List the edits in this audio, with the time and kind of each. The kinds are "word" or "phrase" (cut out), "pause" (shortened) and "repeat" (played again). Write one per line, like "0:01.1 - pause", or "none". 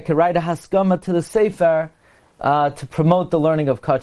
none